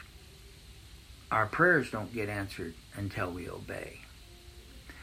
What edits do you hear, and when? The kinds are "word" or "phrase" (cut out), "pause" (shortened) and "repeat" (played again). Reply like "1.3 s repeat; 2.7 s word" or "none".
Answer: none